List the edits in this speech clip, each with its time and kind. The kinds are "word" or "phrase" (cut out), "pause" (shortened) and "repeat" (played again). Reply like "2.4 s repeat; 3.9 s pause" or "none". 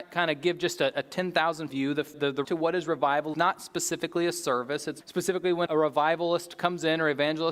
1.7 s word; 2.1 s word; 2.4 s word; 3.3 s word; 5.0 s word; 5.7 s word